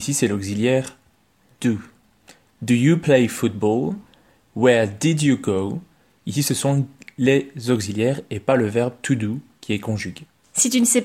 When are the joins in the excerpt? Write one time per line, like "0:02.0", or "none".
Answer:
none